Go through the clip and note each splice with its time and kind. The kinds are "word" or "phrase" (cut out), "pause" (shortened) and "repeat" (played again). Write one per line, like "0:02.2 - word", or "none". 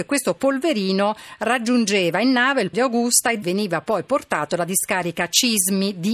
0:02.7 - word
0:03.4 - word